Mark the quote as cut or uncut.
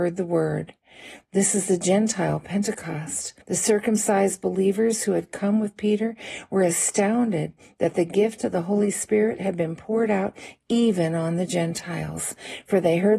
cut